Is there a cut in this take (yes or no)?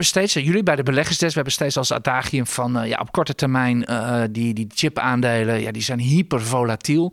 no